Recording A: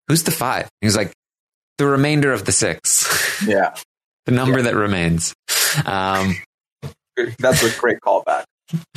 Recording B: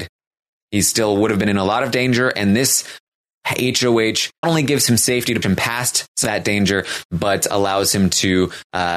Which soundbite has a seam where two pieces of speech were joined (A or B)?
B